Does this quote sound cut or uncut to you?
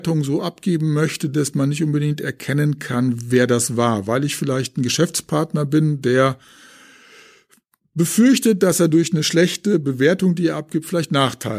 uncut